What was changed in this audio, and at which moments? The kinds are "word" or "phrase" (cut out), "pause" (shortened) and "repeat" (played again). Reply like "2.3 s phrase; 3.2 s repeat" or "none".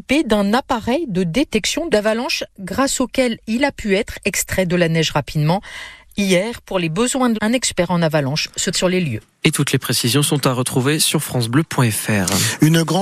1.9 s word; 7.3 s word; 8.7 s word